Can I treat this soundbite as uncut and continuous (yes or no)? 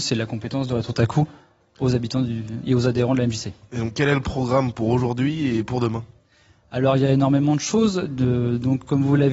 yes